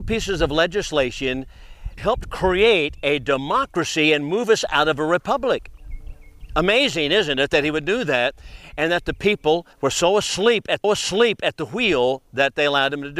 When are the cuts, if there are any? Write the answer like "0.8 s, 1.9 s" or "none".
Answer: 2.0 s, 9.7 s, 10.8 s